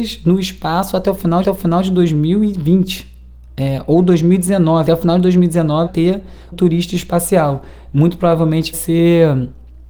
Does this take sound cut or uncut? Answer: cut